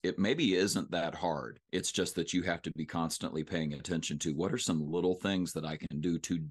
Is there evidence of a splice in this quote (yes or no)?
yes